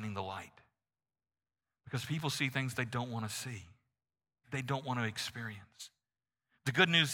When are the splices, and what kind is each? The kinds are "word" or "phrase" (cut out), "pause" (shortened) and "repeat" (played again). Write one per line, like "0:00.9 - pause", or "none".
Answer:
0:04.4 - phrase